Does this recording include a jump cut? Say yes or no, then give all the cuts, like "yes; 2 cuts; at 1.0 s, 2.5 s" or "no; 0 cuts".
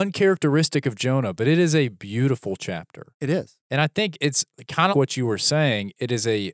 yes; 2 cuts; at 3.1 s, 4.9 s